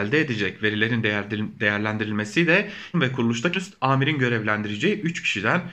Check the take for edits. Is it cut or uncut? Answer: cut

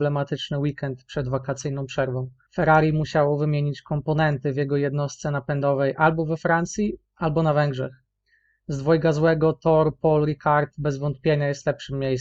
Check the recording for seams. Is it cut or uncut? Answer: uncut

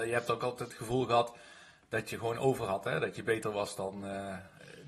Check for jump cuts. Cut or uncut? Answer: uncut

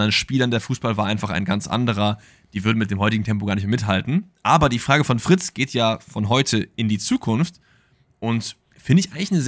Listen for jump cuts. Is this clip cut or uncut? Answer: uncut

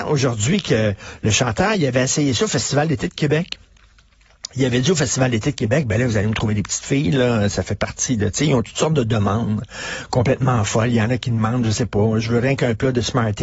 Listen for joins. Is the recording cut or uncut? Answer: uncut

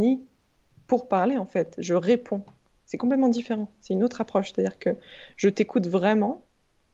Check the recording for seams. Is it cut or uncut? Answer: uncut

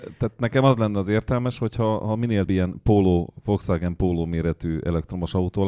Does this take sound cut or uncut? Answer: cut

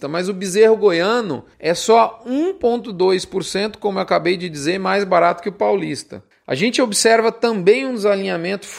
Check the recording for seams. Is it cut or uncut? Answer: cut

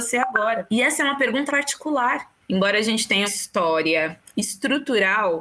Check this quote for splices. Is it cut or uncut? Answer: cut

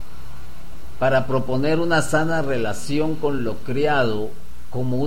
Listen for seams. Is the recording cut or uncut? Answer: uncut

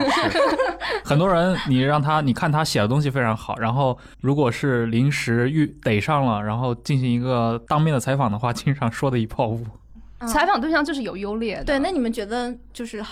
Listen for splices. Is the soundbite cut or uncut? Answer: cut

